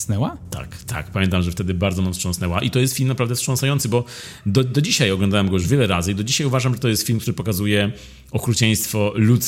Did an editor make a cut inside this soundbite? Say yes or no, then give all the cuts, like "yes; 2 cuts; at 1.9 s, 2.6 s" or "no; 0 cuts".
no; 0 cuts